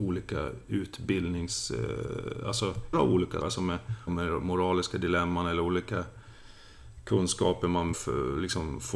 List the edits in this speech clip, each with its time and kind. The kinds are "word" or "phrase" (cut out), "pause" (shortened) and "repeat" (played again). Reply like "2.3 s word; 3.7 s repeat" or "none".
2.9 s word; 3.4 s word; 4.1 s word; 7.9 s word